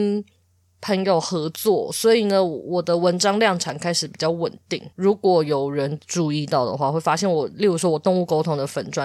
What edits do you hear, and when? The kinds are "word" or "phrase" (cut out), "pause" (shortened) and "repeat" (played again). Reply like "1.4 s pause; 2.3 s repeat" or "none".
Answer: 4.9 s pause

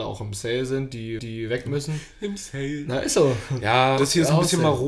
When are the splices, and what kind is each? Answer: 1.2 s repeat; 4.0 s phrase

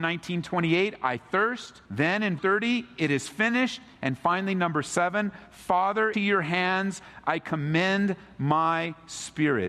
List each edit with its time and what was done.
1.8 s pause; 2.4 s word; 6.1 s word

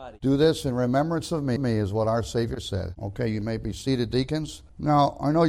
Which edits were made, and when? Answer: 1.6 s repeat

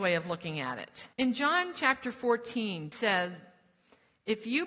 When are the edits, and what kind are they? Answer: 1.1 s pause; 2.9 s word

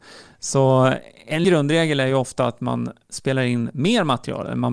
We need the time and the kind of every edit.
1.4 s word

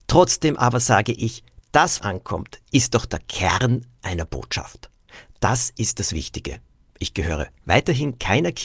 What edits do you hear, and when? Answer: 2.0 s phrase

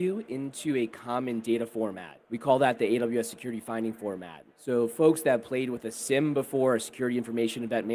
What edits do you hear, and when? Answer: 2.2 s pause; 4.5 s pause

